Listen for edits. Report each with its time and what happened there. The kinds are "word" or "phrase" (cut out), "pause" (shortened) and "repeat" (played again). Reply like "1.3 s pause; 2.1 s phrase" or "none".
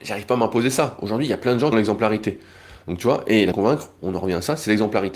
1.7 s phrase; 3.5 s phrase